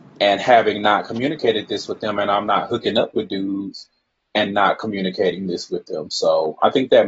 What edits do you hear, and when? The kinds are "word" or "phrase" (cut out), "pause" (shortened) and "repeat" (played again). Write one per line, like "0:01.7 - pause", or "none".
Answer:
none